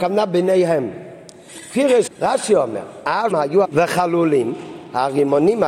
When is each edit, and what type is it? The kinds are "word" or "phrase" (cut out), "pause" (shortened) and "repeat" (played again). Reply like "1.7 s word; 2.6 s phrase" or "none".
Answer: 2.1 s word; 3.3 s word; 3.6 s word